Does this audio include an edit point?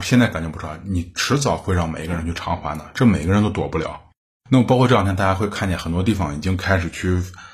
yes; 1 cut; at 4.3 s

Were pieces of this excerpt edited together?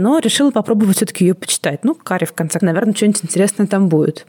yes; 1 cut; at 2.6 s

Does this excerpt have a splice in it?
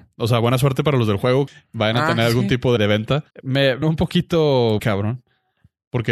yes; 5 cuts; at 1.5 s, 2.8 s, 3.3 s, 3.8 s, 4.8 s

